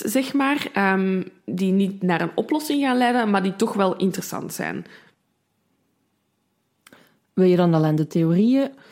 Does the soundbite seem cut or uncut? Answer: uncut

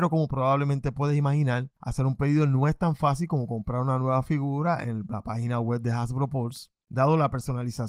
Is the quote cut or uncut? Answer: cut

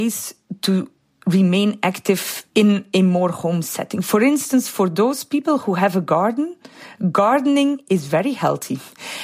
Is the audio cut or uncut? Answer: cut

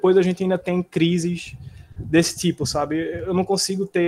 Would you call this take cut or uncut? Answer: uncut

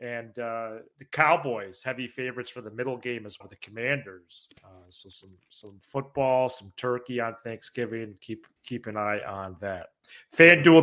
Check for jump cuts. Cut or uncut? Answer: cut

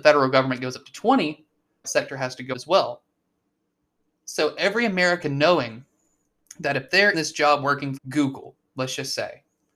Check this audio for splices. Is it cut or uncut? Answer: cut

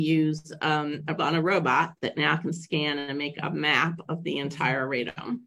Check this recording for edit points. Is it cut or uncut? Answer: cut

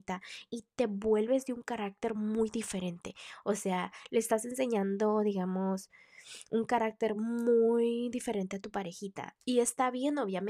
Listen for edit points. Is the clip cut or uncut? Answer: uncut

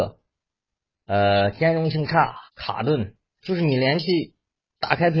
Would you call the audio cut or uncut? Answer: cut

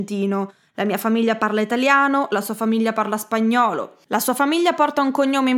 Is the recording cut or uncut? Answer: uncut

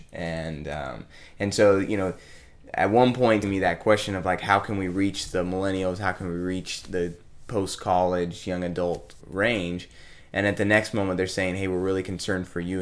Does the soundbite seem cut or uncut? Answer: cut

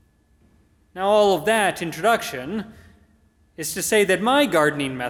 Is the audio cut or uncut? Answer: uncut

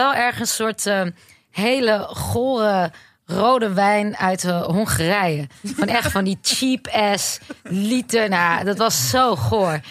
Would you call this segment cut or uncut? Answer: uncut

